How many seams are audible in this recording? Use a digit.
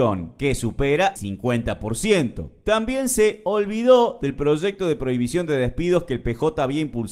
1